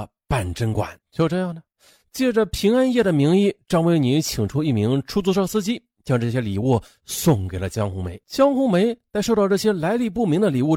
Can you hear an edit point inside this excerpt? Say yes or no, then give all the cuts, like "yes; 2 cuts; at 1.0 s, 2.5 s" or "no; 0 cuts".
yes; 2 cuts; at 1.0 s, 8.2 s